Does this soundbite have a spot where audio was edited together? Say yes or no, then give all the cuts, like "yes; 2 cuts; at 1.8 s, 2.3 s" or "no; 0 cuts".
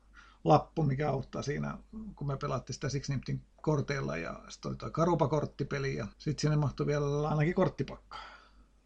yes; 2 cuts; at 3.5 s, 6.1 s